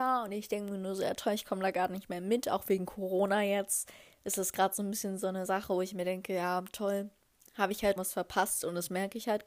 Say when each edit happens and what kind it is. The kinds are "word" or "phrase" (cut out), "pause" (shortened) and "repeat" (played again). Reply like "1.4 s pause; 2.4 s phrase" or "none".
8.0 s word